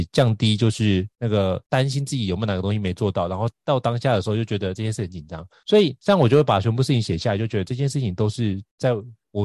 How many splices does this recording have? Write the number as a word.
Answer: one